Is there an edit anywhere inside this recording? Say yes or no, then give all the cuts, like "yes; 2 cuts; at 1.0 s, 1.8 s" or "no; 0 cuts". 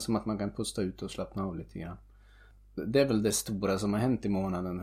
no; 0 cuts